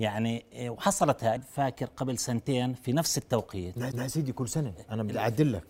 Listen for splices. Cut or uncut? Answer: cut